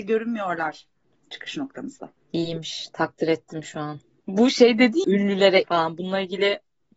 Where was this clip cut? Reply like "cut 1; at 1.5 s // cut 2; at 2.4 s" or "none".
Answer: cut 1; at 5.0 s // cut 2; at 5.6 s